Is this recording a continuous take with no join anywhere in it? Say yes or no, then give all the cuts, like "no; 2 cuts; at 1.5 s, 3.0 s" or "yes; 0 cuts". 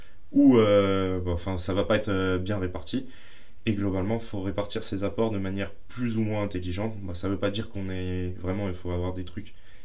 yes; 0 cuts